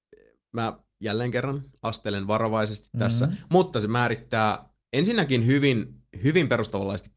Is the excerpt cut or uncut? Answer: cut